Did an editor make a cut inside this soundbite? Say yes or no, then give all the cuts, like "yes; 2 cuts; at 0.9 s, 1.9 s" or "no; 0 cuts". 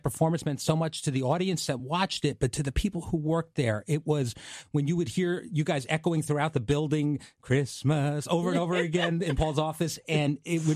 no; 0 cuts